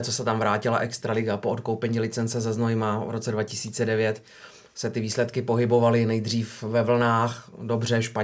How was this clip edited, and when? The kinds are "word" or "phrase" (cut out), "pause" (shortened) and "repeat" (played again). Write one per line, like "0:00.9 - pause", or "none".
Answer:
none